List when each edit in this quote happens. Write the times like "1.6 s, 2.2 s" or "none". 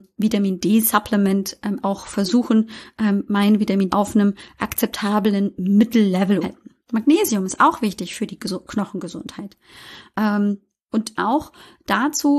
1.8 s, 3.9 s, 6.4 s, 6.8 s, 11.2 s